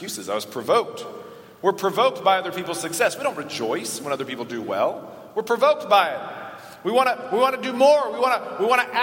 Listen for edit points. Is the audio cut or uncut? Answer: uncut